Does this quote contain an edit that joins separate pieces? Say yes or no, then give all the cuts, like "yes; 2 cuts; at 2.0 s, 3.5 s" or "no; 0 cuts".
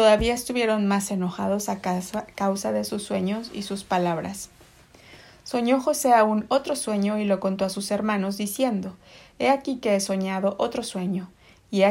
no; 0 cuts